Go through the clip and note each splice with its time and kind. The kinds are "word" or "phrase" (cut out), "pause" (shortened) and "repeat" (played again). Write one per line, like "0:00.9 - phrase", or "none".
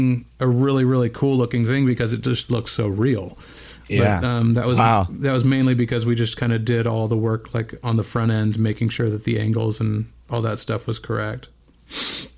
none

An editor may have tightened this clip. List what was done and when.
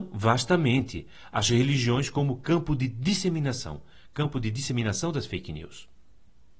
none

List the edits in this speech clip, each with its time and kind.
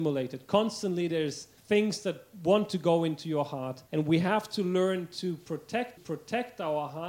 0:01.6 - pause
0:03.9 - pause
0:06.0 - repeat

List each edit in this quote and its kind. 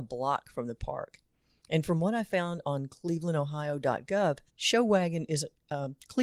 0:04.5 - pause

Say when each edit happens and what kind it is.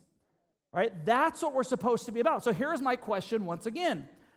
none

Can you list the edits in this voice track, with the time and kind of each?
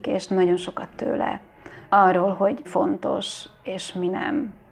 0:00.9 - word
0:01.8 - pause
0:02.6 - word

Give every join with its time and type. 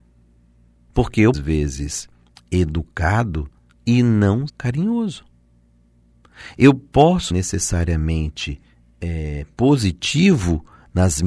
0:01.3 - phrase
0:03.7 - pause
0:04.5 - word
0:07.3 - word

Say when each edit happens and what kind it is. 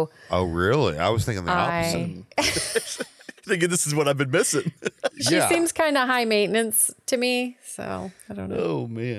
0:02.3 - pause
0:03.4 - pause
0:08.2 - pause

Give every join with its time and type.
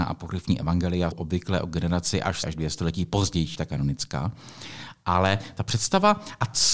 0:01.1 - word
0:02.4 - word
0:03.5 - word

